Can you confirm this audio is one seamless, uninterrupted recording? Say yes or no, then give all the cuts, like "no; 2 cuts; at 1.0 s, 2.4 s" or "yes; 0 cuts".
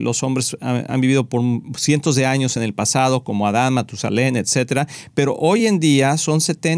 yes; 0 cuts